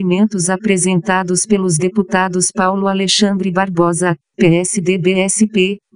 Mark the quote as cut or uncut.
uncut